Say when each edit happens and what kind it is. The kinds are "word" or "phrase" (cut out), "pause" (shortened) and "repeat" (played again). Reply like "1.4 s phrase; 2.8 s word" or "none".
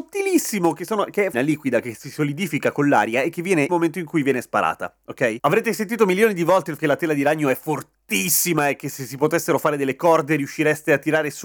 1.3 s phrase; 3.7 s phrase; 6.8 s word